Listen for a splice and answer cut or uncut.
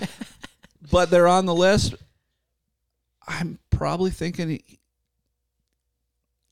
uncut